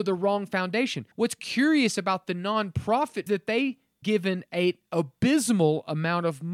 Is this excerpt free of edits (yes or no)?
no